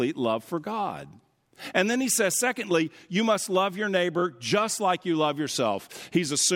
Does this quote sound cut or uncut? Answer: uncut